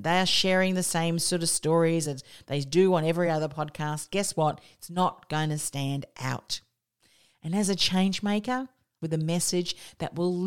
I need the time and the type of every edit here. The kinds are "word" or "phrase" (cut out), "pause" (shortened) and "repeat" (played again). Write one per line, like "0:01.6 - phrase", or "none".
none